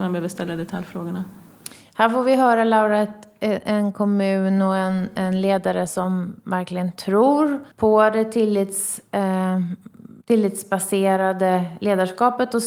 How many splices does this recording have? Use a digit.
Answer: 2